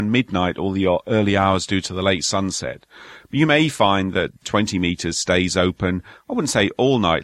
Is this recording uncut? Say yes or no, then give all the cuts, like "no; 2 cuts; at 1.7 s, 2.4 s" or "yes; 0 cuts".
no; 1 cut; at 4.4 s